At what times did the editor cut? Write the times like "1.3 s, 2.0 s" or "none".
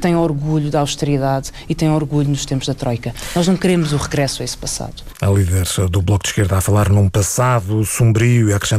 none